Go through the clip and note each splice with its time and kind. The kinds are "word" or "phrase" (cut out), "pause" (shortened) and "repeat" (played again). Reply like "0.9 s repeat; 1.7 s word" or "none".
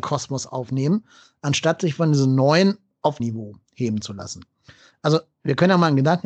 3.2 s word